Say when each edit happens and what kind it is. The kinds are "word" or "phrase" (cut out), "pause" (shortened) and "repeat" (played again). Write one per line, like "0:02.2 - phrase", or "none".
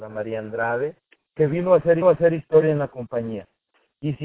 0:01.1 - pause
0:02.0 - repeat